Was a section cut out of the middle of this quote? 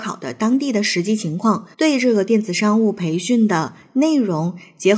yes; 1 cut; at 1.7 s

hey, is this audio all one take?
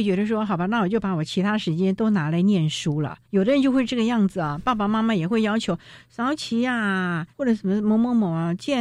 no; 1 cut; at 7.3 s

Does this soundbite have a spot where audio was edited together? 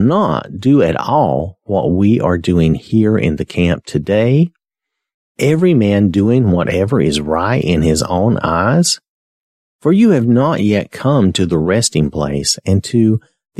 no; 0 cuts

